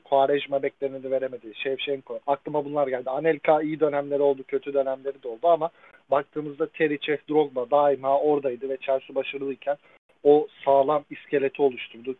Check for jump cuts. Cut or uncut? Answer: cut